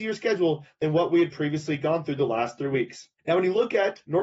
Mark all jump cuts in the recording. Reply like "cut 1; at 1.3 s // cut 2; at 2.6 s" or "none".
cut 1; at 3.2 s